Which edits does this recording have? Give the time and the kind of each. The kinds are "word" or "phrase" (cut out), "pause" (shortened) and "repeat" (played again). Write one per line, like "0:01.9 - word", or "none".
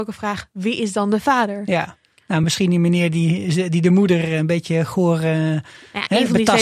none